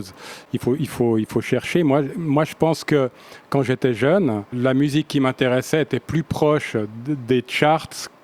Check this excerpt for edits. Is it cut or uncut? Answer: cut